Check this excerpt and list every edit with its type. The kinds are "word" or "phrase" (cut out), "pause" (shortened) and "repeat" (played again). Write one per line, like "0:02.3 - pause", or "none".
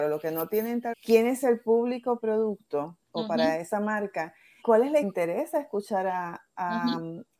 0:00.9 - phrase
0:02.2 - phrase
0:03.0 - pause
0:04.6 - word
0:05.0 - phrase

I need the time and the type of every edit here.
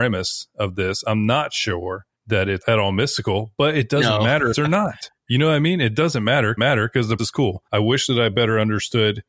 0:02.2 - pause
0:02.6 - word
0:04.5 - phrase
0:06.6 - repeat
0:07.2 - word
0:07.7 - pause

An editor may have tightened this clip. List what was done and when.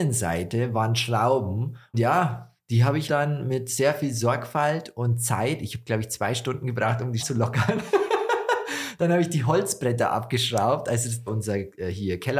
0:01.9 - word
0:03.1 - word
0:07.2 - word
0:11.3 - word

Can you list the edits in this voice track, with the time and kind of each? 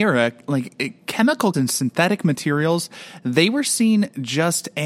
0:01.5 - word

